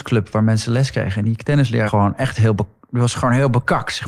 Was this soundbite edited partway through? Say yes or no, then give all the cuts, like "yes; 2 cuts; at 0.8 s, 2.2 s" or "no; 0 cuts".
yes; 1 cut; at 1.9 s